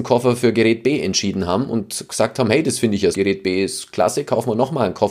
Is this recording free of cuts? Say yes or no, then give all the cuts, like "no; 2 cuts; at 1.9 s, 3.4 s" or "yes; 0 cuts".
no; 1 cut; at 3.1 s